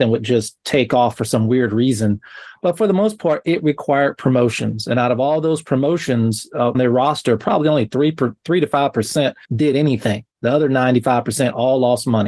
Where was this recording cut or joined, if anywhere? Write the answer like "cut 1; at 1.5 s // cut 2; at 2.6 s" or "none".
cut 1; at 6.7 s // cut 2; at 9.4 s